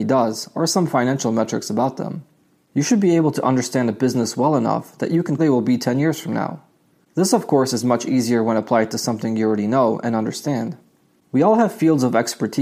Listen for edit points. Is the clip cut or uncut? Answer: cut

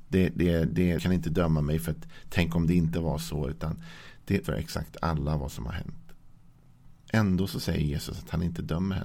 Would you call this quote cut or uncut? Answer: cut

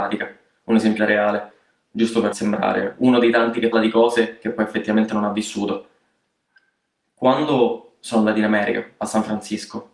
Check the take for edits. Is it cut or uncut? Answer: cut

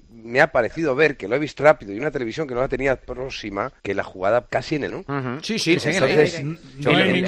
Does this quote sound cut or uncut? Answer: cut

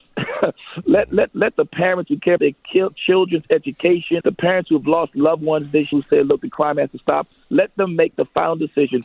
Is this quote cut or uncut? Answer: cut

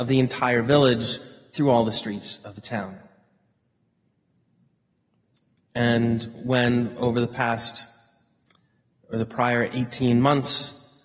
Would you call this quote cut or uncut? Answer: uncut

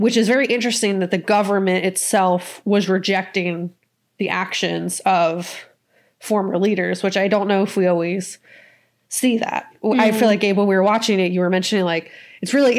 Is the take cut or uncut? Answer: uncut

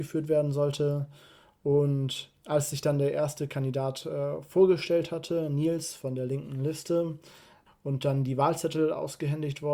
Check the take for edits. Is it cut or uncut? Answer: uncut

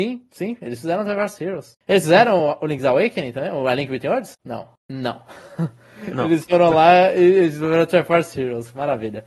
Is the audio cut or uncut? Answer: uncut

